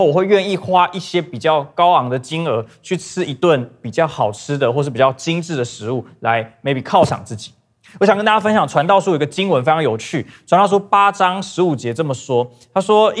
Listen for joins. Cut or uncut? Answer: uncut